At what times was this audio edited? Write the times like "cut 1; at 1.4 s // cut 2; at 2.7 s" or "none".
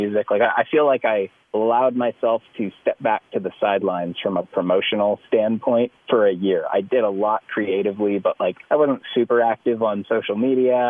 cut 1; at 1.4 s // cut 2; at 6.0 s // cut 3; at 8.6 s